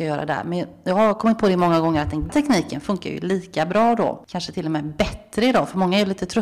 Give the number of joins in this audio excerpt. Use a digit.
1